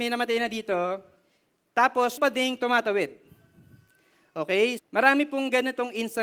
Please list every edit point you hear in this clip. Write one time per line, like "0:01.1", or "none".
0:02.2
0:04.8